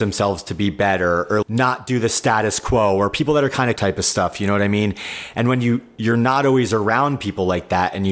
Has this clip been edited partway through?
yes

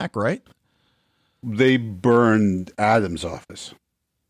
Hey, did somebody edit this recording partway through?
no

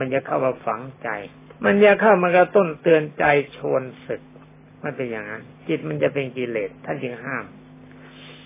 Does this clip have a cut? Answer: yes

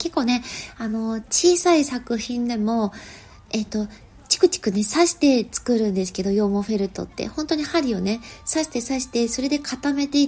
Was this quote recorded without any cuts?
yes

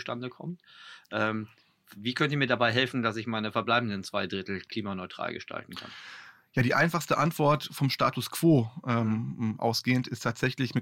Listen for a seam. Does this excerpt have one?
no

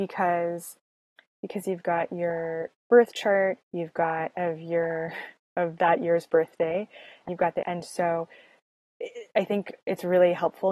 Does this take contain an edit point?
yes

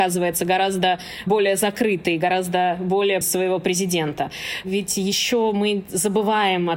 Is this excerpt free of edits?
no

